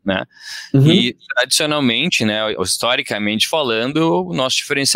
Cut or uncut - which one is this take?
uncut